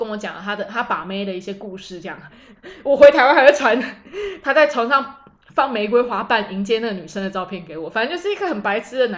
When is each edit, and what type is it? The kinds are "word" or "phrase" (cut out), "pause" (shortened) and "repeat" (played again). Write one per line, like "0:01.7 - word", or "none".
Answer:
none